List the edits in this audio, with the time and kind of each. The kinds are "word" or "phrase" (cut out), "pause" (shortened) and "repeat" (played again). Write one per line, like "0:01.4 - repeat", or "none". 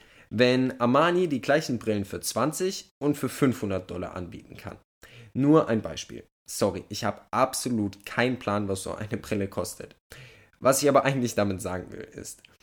none